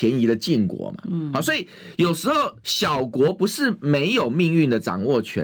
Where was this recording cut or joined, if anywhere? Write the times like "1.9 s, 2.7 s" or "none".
2.6 s